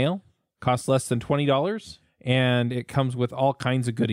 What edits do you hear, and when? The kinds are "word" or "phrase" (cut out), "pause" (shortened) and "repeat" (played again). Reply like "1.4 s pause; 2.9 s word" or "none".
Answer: none